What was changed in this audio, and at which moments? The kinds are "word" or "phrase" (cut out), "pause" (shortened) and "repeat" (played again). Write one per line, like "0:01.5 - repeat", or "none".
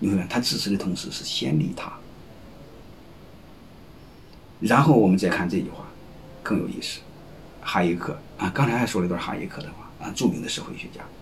0:04.6 - word